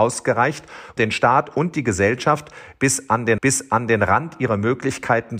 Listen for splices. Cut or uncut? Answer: cut